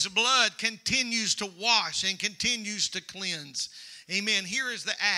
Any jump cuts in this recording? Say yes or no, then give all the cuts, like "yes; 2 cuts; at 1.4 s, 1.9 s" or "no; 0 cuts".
no; 0 cuts